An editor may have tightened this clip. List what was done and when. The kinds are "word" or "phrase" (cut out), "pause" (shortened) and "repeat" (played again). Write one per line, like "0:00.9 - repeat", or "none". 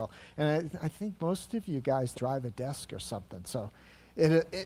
0:02.1 - word